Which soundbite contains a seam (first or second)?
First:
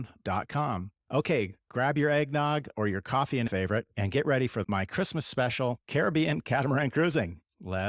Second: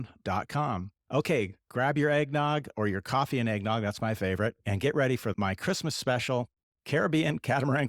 first